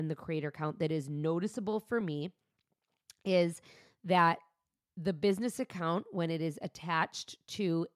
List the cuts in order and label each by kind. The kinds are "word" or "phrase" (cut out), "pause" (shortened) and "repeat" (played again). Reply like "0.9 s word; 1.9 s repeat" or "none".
none